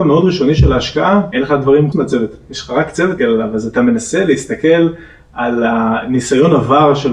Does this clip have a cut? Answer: yes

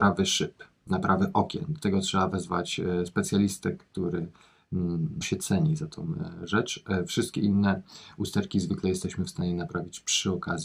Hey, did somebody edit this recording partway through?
yes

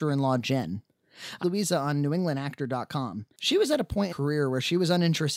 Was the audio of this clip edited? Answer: yes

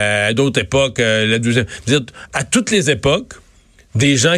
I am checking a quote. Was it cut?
no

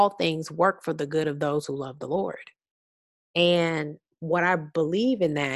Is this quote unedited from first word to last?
yes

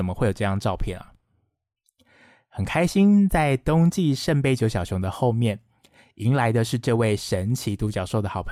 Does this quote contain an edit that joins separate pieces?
no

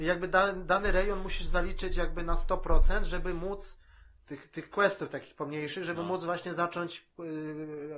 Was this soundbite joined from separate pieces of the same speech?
no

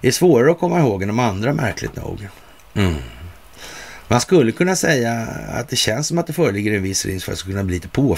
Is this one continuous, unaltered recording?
yes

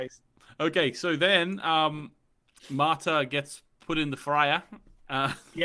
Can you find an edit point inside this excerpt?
no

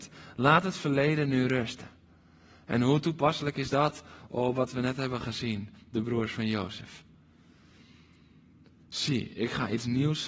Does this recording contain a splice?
no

